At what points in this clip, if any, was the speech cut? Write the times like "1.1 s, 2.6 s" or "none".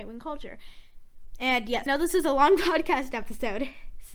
1.9 s